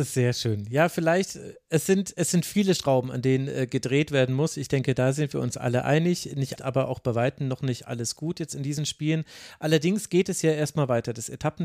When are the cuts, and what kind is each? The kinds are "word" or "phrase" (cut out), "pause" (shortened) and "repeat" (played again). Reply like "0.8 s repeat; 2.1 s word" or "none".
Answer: 6.6 s phrase